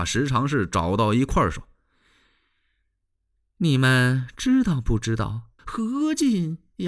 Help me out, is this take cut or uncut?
cut